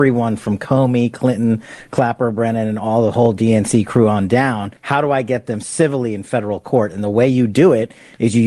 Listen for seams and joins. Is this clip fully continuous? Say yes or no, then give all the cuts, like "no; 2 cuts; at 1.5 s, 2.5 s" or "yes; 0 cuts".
no; 1 cut; at 4.8 s